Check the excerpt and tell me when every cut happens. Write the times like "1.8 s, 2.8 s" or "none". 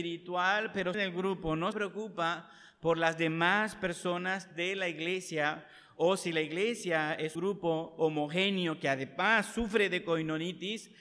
0.9 s, 1.7 s, 7.4 s